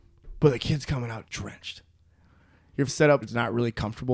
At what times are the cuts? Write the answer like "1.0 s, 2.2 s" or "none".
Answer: 1.3 s, 2.9 s, 3.2 s